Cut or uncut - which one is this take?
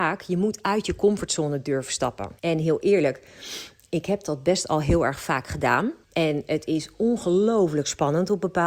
cut